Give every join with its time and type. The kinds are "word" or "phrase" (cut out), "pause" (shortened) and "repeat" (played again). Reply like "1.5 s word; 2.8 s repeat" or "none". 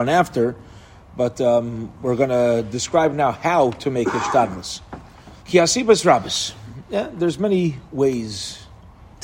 5.4 s pause; 7.9 s pause